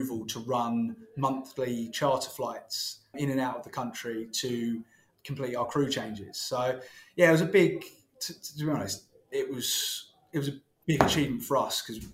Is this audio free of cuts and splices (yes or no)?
no